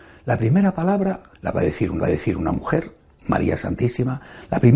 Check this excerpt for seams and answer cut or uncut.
cut